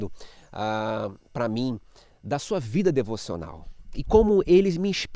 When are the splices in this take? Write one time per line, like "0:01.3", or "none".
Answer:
none